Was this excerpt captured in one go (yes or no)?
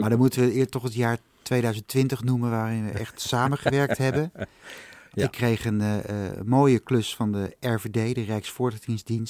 yes